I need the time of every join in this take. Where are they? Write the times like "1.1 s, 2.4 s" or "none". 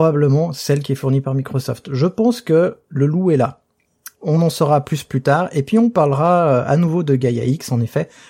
4.1 s